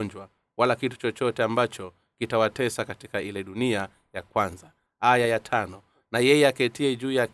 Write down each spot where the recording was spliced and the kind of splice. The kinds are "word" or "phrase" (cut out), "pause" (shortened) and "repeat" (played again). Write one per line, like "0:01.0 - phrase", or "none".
none